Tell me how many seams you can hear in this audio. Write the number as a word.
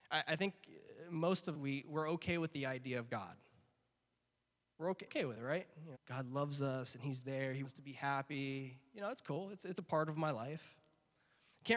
four